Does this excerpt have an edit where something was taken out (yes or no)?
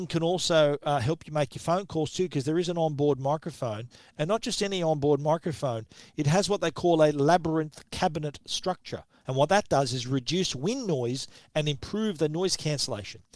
no